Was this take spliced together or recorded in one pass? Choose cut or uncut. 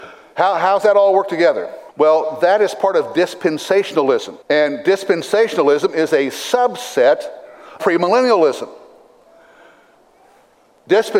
cut